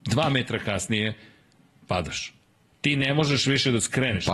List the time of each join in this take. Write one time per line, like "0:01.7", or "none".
none

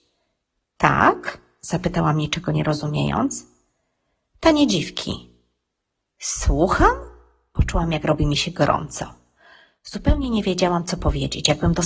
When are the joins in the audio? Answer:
none

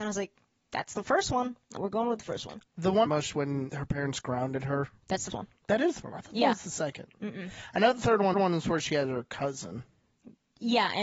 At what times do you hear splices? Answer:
0:01.8
0:03.1
0:03.7
0:05.3
0:06.0
0:08.3

